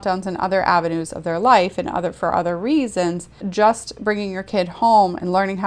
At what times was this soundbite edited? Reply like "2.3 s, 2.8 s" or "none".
3.4 s